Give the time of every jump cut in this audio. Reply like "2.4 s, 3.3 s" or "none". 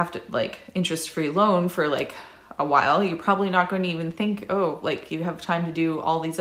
none